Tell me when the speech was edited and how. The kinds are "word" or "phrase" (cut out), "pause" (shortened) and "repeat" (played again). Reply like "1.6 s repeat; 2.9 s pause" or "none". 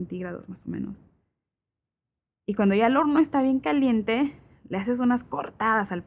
none